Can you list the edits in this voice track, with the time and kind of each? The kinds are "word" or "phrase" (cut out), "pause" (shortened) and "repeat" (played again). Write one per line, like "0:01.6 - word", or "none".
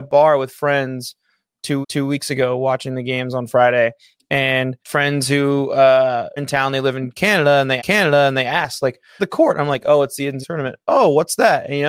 0:01.8 - repeat
0:04.8 - pause
0:06.4 - phrase
0:07.8 - repeat
0:09.2 - phrase
0:10.4 - word